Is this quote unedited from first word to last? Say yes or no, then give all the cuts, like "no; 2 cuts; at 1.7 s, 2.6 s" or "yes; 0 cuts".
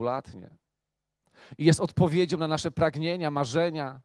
yes; 0 cuts